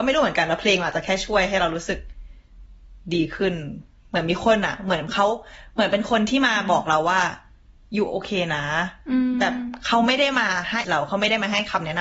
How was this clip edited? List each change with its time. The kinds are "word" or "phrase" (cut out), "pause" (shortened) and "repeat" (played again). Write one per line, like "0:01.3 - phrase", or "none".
0:10.8 - word